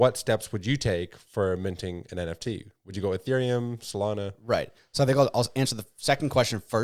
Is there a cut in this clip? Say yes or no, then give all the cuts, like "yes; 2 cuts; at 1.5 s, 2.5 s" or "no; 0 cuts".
no; 0 cuts